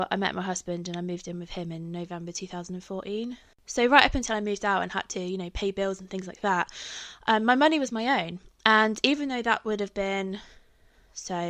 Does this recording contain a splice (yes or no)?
no